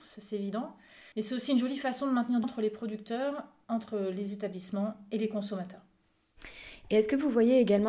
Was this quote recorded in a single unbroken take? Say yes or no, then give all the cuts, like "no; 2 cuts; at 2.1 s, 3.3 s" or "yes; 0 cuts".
no; 2 cuts; at 1.1 s, 2.4 s